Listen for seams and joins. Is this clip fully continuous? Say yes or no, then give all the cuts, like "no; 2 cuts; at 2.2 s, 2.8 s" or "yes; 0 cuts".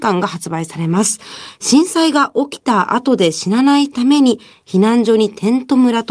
yes; 0 cuts